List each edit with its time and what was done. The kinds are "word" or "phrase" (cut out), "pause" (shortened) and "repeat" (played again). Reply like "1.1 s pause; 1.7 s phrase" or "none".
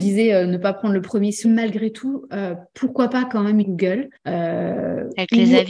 1.4 s phrase; 3.6 s word; 4.2 s pause